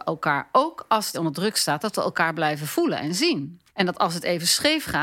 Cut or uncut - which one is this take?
cut